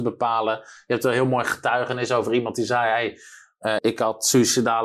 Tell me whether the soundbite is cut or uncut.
cut